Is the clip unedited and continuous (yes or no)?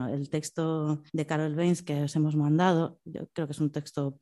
no